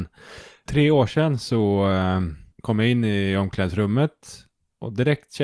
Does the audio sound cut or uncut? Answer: cut